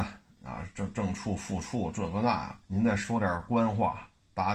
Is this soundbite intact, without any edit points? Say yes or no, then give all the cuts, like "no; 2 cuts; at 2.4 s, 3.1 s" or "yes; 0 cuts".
no; 1 cut; at 2.6 s